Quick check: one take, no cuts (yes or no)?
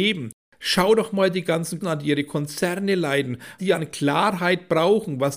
no